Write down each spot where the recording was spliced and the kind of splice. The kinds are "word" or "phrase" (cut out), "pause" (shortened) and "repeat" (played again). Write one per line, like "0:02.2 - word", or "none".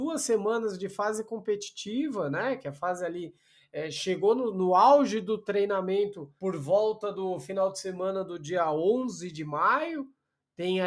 0:06.4 - pause